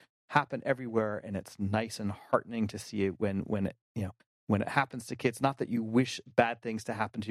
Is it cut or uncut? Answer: uncut